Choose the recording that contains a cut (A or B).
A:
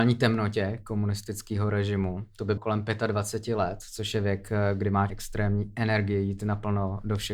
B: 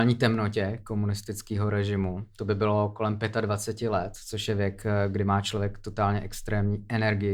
A